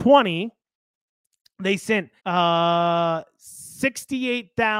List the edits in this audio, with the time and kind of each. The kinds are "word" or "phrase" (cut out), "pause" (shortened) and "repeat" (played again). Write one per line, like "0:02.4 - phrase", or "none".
0:02.2 - pause